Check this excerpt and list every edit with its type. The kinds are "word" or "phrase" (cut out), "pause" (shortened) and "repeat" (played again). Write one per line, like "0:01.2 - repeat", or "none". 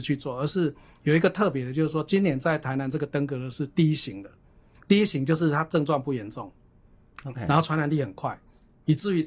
none